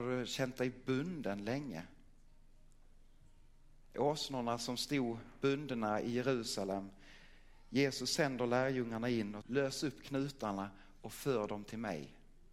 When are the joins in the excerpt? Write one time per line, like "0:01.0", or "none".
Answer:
0:09.4